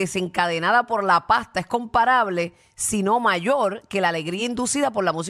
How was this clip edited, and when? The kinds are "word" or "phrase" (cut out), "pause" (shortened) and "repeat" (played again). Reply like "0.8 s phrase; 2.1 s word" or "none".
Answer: none